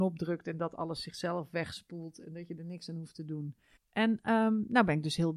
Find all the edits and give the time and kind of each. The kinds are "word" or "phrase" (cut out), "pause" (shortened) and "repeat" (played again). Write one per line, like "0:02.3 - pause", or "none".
0:03.8 - pause